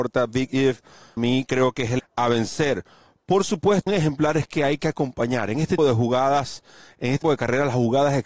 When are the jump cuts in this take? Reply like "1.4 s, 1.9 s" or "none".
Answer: 1.2 s, 2.0 s, 3.9 s, 5.8 s, 7.2 s

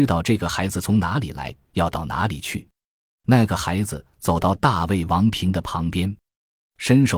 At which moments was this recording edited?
none

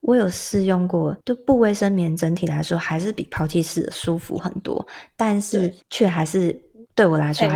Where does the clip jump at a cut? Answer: 1.2 s, 5.8 s

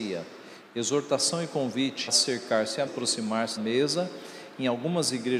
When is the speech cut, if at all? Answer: 2.1 s, 2.9 s, 3.6 s

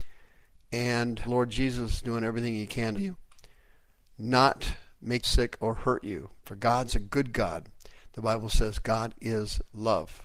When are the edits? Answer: 1.2 s, 3.0 s, 5.2 s

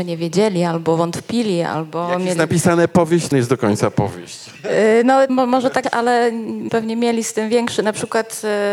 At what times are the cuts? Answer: 3.3 s, 5.3 s, 5.8 s, 6.7 s

